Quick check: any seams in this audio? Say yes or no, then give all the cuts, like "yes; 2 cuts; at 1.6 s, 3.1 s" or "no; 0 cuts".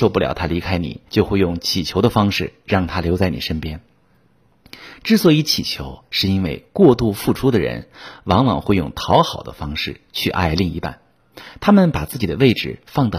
yes; 1 cut; at 1.1 s